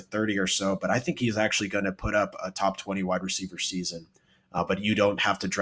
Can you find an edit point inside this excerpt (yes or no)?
no